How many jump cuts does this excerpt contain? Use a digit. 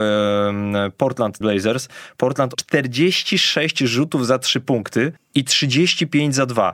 3